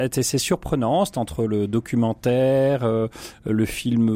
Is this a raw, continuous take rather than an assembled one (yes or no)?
yes